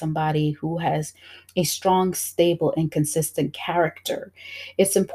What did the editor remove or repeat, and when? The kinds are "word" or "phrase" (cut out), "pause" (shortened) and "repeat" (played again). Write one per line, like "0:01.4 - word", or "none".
none